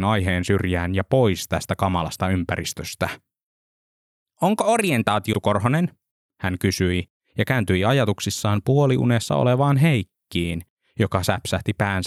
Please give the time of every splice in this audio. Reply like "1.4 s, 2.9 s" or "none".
5.3 s

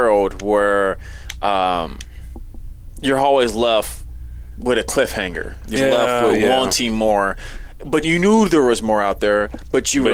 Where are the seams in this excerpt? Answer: 5.8 s, 8.0 s

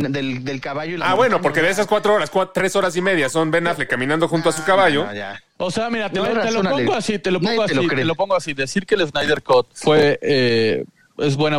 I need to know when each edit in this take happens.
9.7 s

